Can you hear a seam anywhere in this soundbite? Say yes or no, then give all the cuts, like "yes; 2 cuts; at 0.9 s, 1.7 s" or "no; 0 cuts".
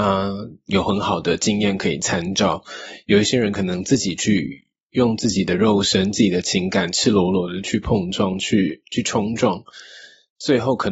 no; 0 cuts